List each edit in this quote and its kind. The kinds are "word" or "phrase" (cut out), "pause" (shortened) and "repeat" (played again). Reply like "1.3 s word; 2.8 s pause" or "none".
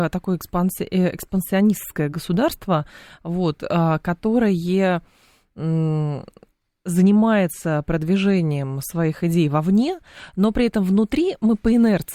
none

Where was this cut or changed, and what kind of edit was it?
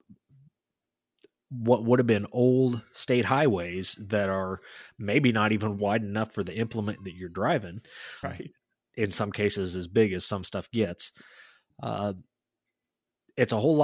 8.2 s word

